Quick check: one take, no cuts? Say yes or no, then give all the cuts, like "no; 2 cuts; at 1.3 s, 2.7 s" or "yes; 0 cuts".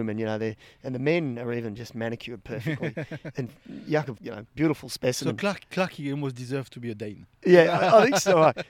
no; 2 cuts; at 4.2 s, 4.5 s